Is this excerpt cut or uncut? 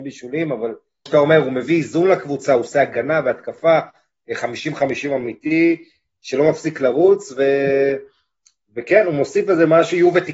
cut